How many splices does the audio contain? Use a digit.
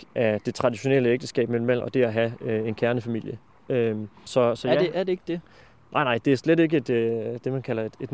2